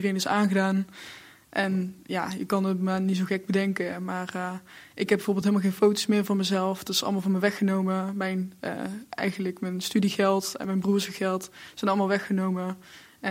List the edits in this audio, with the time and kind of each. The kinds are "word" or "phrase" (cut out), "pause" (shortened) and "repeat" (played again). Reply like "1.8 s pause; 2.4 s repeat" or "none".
none